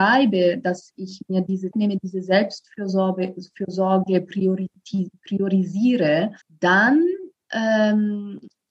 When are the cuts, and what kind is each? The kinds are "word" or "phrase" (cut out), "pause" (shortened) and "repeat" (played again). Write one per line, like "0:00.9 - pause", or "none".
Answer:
0:01.7 - word
0:06.4 - pause